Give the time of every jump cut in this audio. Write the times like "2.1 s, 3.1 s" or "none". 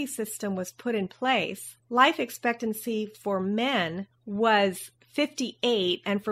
1.8 s, 4.1 s